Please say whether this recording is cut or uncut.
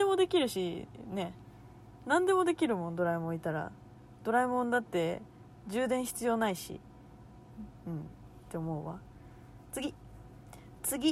uncut